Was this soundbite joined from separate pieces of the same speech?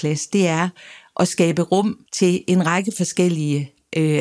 yes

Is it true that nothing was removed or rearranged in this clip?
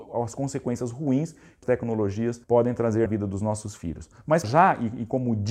no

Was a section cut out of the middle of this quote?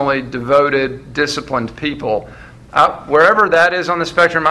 no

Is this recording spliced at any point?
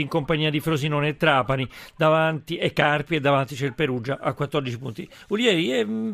no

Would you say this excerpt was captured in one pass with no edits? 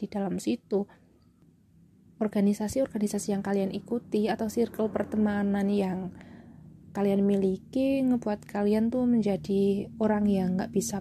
yes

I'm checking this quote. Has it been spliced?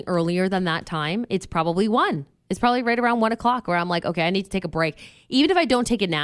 no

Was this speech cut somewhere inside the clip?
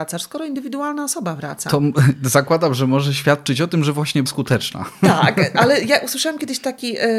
yes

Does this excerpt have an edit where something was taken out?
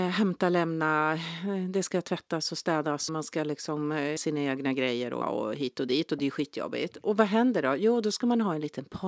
yes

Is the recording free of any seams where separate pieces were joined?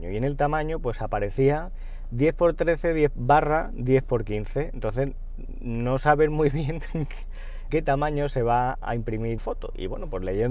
no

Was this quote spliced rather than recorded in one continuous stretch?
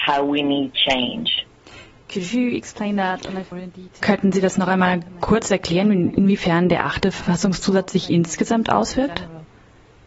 yes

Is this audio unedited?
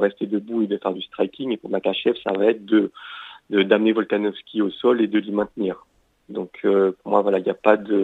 yes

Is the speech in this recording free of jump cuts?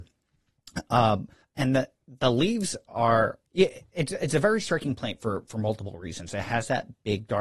no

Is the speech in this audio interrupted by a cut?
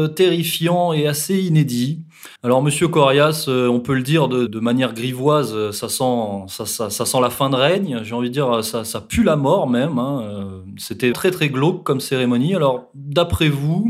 yes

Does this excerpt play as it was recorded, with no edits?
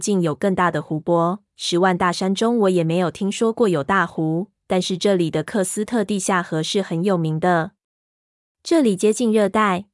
yes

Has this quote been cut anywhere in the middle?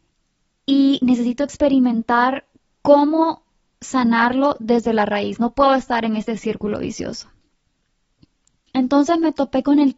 no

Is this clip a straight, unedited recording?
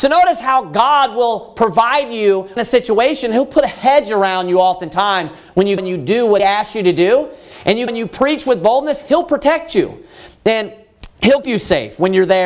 no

